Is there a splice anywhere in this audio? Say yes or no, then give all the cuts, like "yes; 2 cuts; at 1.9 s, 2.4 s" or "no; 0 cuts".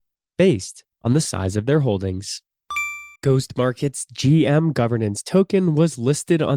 yes; 2 cuts; at 0.9 s, 3.2 s